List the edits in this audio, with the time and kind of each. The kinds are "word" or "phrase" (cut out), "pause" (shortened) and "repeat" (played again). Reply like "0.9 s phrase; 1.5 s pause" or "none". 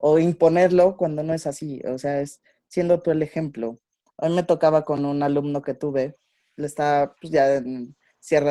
none